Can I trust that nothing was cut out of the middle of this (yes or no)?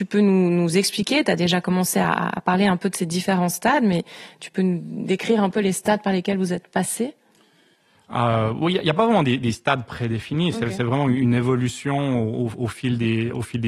yes